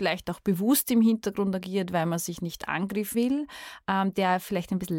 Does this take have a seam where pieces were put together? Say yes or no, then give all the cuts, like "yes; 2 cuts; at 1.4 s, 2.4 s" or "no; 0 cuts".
yes; 1 cut; at 3.1 s